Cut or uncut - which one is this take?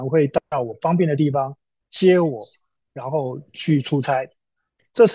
uncut